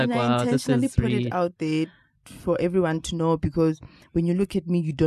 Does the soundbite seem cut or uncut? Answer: uncut